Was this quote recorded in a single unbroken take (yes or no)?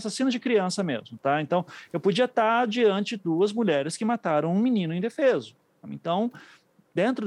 no